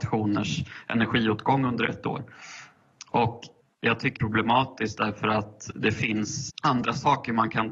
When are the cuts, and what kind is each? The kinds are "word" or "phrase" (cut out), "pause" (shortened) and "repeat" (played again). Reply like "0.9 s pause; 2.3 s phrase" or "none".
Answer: 3.6 s pause; 4.2 s phrase; 6.5 s word